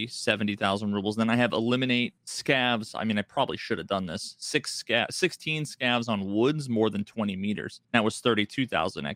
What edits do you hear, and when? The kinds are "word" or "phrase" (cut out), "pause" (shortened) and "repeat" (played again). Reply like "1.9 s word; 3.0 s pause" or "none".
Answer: 2.2 s pause; 7.8 s pause